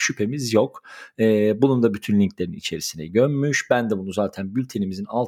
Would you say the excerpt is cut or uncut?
uncut